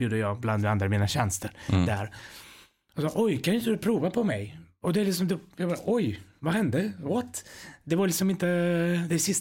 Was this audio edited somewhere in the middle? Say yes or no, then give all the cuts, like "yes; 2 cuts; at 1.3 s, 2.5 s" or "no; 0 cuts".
no; 0 cuts